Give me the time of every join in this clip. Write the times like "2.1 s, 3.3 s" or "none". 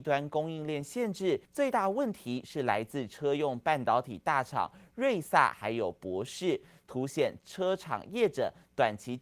1.5 s